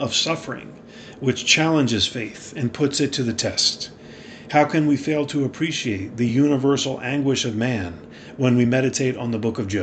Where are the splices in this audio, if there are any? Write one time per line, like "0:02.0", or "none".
none